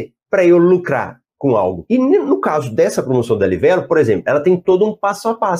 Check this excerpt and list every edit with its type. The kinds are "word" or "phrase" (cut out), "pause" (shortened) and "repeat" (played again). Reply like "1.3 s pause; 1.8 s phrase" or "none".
none